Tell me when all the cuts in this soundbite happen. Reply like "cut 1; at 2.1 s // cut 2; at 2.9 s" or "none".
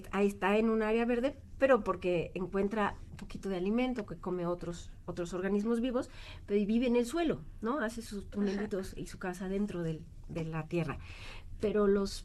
none